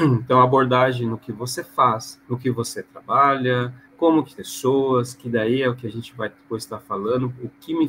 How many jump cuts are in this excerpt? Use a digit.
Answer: 3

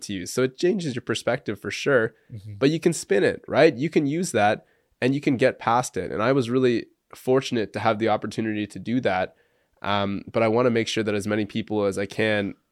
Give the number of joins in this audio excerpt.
0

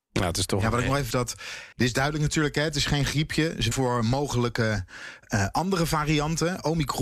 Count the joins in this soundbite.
4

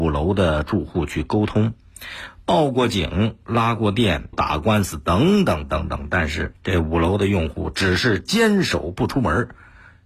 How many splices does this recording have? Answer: 2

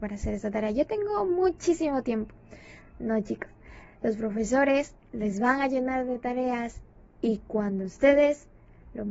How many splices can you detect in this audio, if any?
0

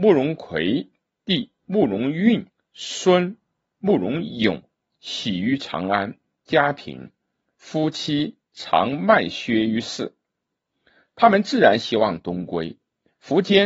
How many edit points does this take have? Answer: 1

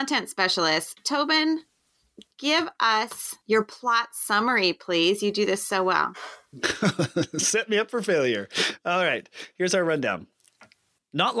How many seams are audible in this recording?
1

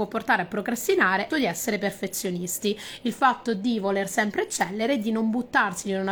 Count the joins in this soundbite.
1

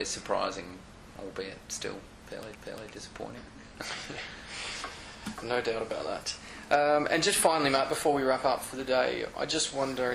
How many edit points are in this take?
1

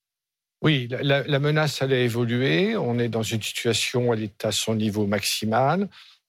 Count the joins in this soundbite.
0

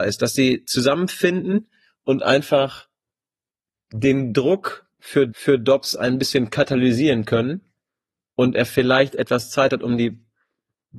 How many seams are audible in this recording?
1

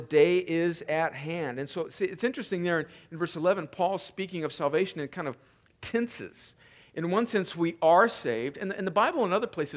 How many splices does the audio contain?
0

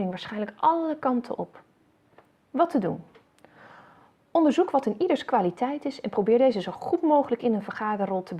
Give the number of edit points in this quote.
0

